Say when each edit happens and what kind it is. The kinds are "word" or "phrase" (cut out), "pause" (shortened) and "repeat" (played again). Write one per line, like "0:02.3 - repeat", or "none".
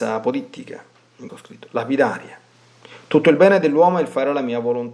0:01.3 - word